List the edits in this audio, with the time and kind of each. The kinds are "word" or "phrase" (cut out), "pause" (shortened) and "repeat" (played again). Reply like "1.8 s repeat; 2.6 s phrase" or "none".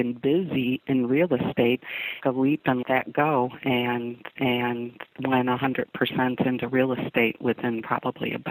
2.2 s phrase; 2.8 s word; 4.4 s repeat